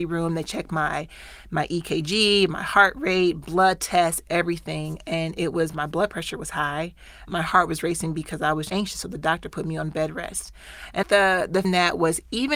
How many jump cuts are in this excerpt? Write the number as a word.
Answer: four